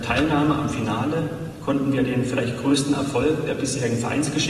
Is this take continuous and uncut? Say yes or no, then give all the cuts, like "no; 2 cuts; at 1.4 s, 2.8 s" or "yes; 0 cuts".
yes; 0 cuts